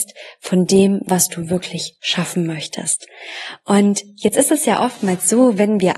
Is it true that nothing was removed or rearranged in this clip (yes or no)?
yes